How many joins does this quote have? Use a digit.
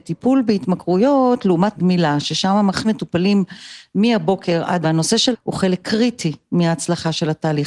4